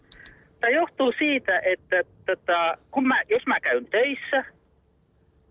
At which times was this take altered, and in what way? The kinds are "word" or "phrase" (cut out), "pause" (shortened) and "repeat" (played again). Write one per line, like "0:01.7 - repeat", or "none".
none